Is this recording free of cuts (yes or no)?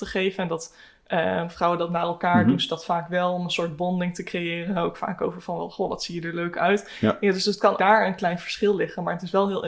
no